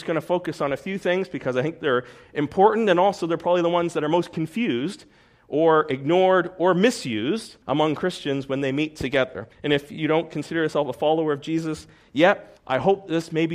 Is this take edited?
yes; 3 cuts; at 7.6 s, 9.5 s, 12.6 s

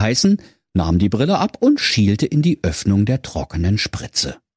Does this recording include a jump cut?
no; 0 cuts

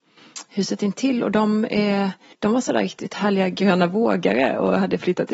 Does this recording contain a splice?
yes; 1 cut; at 2.3 s

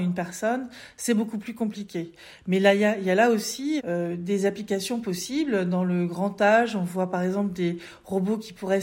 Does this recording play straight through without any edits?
no; 1 cut; at 3.8 s

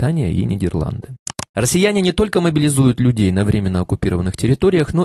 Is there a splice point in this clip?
no; 0 cuts

